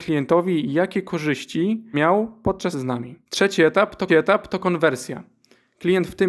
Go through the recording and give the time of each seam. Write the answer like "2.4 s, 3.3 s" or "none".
1.9 s, 2.7 s, 3.3 s, 4.1 s